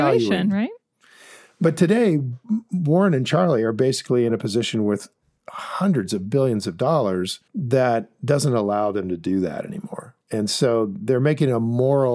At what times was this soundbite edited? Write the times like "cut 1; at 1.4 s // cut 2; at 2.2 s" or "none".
cut 1; at 7.5 s // cut 2; at 10.2 s

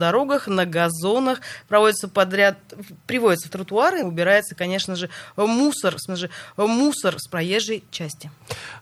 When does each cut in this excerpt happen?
cut 1; at 3.5 s // cut 2; at 4.0 s // cut 3; at 6.1 s

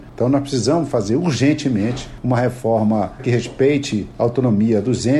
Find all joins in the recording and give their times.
cut 1; at 3.2 s

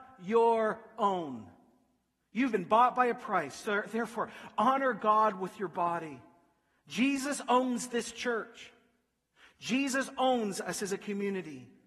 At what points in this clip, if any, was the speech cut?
none

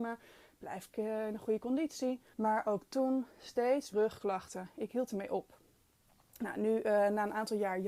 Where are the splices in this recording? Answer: cut 1; at 2.3 s // cut 2; at 3.9 s

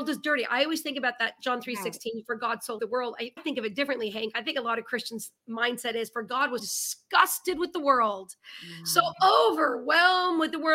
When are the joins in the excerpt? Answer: cut 1; at 2.8 s // cut 2; at 3.4 s // cut 3; at 6.6 s

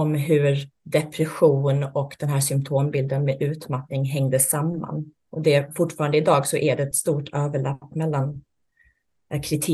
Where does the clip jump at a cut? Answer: cut 1; at 5.2 s

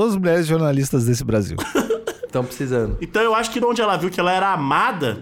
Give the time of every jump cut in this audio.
cut 1; at 3.6 s

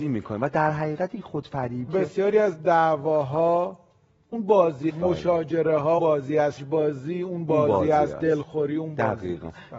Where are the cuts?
cut 1; at 1.9 s // cut 2; at 4.9 s // cut 3; at 6.0 s // cut 4; at 6.6 s

